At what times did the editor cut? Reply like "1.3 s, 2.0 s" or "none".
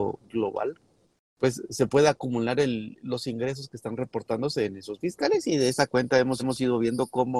1.0 s, 5.0 s, 6.4 s